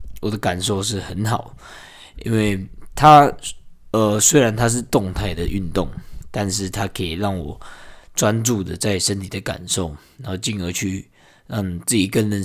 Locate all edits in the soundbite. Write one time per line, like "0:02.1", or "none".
none

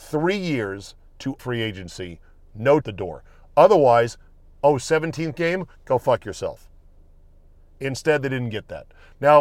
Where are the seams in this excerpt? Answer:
0:01.4
0:02.8

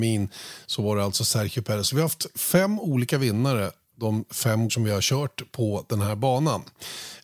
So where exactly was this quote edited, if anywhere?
0:04.7

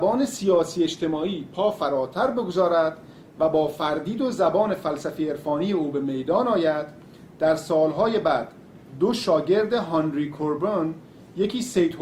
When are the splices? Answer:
none

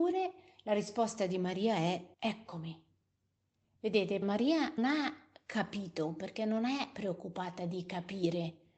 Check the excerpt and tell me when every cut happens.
0:02.1
0:04.2
0:04.8

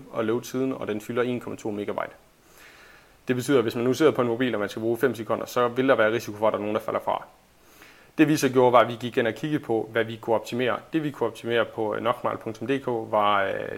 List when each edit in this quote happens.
none

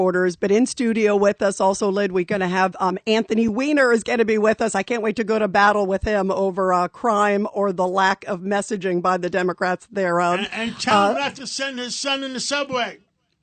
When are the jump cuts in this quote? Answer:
none

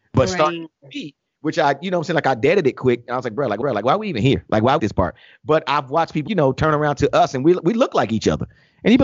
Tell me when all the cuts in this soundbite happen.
0:03.6
0:04.8
0:06.3

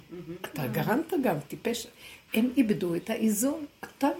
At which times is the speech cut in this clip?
none

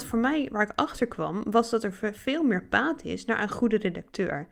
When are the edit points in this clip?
none

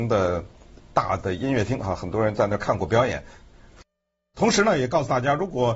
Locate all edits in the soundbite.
none

